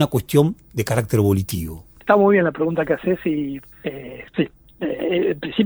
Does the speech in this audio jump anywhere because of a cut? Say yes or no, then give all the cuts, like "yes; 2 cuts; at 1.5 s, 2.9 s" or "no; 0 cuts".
yes; 1 cut; at 3.7 s